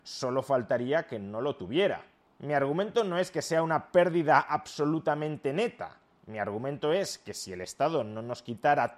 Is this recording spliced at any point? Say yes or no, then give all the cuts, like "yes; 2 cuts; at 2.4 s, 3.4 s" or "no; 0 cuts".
no; 0 cuts